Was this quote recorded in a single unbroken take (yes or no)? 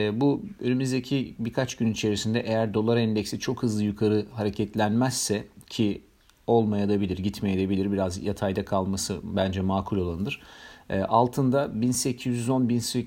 yes